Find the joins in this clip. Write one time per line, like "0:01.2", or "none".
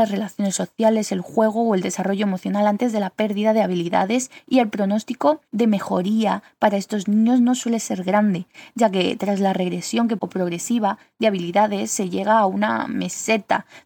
0:10.2